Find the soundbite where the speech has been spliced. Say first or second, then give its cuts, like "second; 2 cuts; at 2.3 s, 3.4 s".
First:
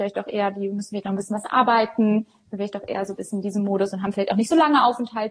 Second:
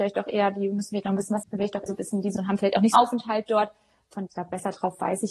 second; 5 cuts; at 1.4 s, 1.9 s, 2.4 s, 2.9 s, 4.3 s